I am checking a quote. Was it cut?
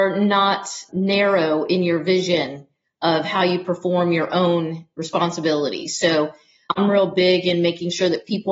no; 0 cuts

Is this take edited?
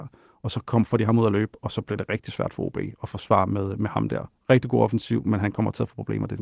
no; 0 cuts

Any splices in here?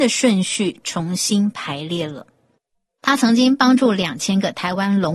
no; 0 cuts

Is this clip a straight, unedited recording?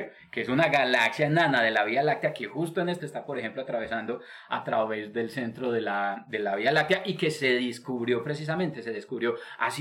no; 1 cut; at 3.0 s

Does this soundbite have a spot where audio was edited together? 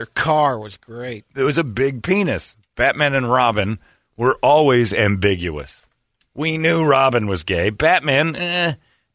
no; 0 cuts

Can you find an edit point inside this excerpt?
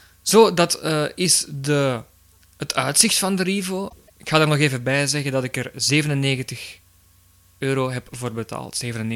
no; 0 cuts

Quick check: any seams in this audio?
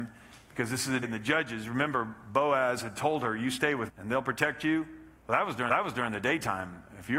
yes; 4 cuts; at 1.0 s, 3.9 s, 5.2 s, 5.7 s

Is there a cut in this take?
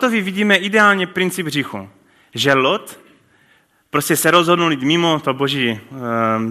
no; 0 cuts

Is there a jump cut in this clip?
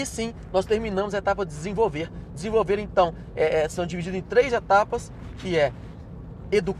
no; 0 cuts

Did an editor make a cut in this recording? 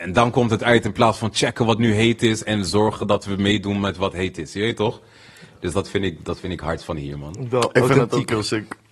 no; 0 cuts

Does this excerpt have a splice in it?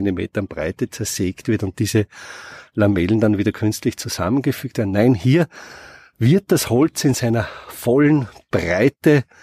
no; 0 cuts

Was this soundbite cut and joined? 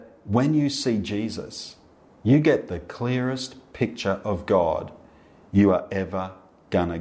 no; 0 cuts

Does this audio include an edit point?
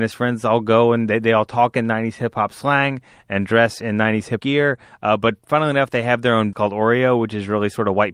yes; 2 cuts; at 4.4 s, 6.5 s

